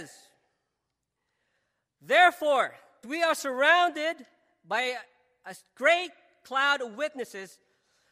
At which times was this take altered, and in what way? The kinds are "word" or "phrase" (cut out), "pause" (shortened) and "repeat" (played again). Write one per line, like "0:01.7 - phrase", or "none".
0:03.0 - word